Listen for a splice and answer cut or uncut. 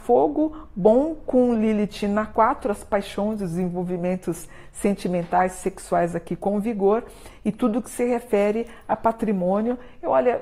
uncut